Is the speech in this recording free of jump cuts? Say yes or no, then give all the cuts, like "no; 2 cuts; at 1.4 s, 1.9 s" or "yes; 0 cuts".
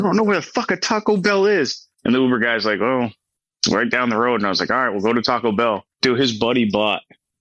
no; 2 cuts; at 1.9 s, 5.9 s